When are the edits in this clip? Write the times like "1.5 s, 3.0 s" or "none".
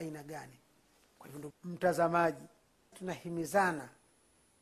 1.5 s, 2.9 s